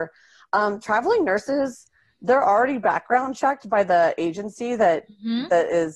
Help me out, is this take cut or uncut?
uncut